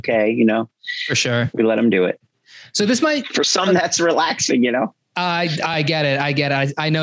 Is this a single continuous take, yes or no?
yes